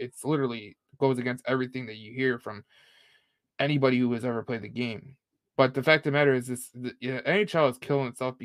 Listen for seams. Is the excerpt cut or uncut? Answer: uncut